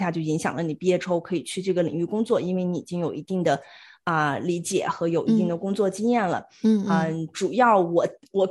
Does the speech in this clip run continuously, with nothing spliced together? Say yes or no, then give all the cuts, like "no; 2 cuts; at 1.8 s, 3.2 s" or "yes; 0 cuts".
yes; 0 cuts